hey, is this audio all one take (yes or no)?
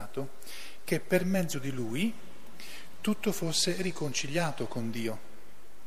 yes